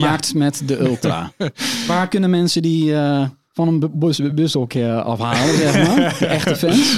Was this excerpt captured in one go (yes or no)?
yes